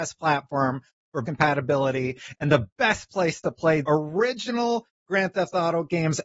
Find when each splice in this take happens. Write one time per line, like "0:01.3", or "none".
0:01.2
0:03.8